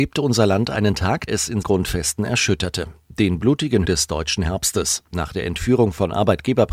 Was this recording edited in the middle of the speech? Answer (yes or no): yes